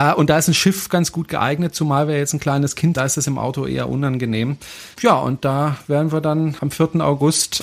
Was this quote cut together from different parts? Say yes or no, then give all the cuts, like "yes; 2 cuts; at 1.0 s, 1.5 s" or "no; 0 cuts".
yes; 2 cuts; at 2.9 s, 4.9 s